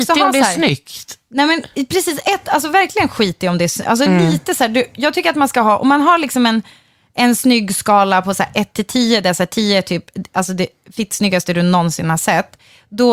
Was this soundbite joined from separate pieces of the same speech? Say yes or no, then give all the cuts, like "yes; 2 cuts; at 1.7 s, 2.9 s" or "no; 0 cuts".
no; 0 cuts